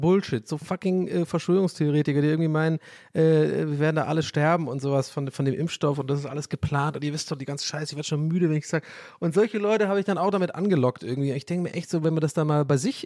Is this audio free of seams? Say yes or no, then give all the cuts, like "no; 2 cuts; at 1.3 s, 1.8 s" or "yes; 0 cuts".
yes; 0 cuts